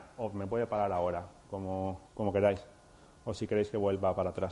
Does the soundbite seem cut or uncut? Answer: cut